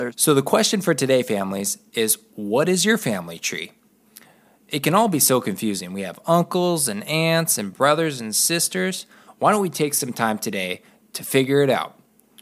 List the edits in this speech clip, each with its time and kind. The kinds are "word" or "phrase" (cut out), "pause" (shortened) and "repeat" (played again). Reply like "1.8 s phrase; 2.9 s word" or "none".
none